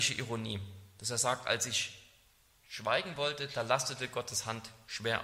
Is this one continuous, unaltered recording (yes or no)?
yes